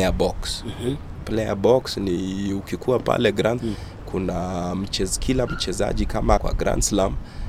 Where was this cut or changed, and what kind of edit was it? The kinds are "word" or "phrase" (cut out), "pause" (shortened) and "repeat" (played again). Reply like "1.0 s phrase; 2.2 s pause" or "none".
3.6 s word; 6.4 s word